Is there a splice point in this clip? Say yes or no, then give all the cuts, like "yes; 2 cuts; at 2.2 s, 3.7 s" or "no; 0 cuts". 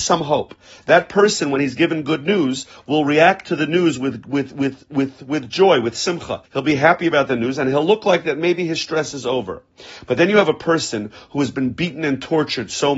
yes; 1 cut; at 6.5 s